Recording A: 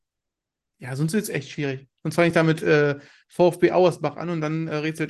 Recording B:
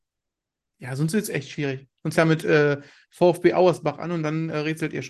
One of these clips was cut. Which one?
B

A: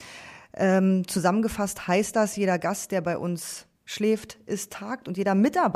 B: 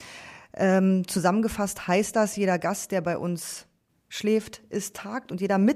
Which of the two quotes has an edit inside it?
A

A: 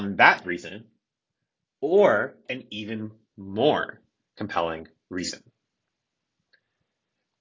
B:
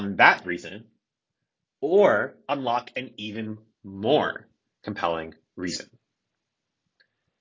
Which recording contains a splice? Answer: A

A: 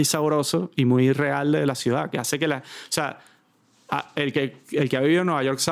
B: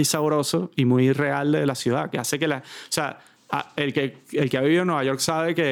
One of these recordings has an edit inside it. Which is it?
B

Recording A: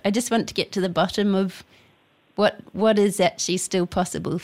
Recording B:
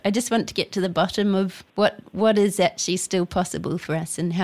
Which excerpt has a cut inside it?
B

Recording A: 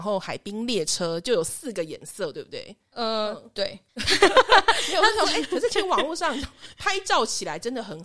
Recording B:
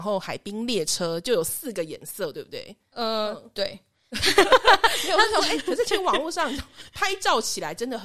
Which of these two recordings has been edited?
A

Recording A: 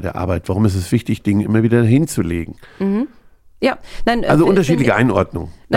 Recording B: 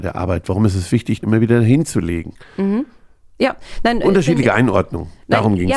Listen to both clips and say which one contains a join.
B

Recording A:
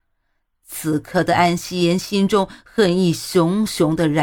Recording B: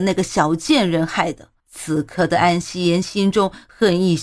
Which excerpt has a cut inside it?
B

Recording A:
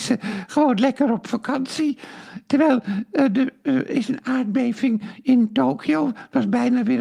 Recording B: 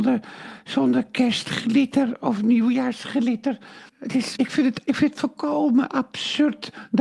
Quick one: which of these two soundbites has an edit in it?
B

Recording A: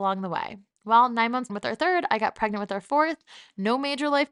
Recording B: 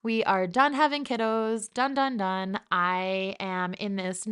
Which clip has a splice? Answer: A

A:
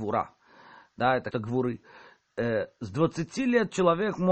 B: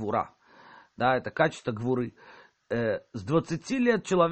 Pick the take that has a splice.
A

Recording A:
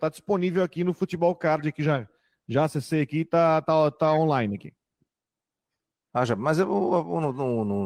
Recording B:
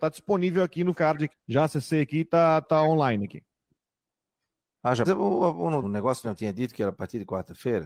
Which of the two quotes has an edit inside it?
B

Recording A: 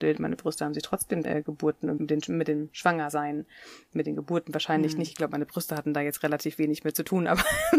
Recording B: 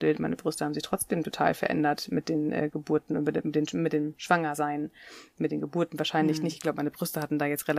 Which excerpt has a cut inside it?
A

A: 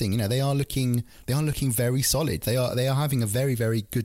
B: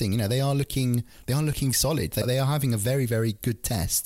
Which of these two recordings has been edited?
B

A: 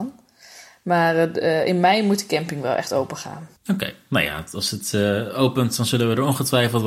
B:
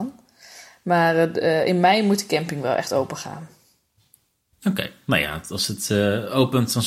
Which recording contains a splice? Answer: A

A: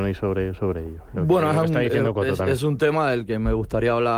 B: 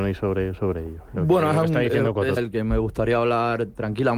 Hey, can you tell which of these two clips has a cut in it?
B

